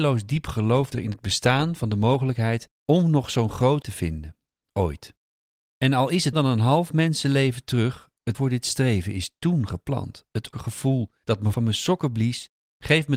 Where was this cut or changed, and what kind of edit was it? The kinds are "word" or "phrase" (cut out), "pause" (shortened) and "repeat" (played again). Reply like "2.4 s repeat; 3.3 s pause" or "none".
0.9 s word; 3.8 s word; 6.3 s word; 8.3 s word; 10.5 s word; 11.5 s word